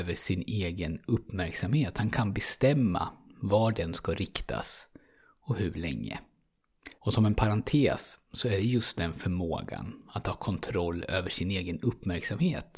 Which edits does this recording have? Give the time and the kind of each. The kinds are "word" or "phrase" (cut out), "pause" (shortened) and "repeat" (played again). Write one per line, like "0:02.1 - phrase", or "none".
0:06.9 - pause